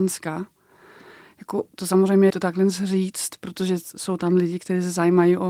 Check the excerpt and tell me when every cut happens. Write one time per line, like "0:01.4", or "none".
0:02.3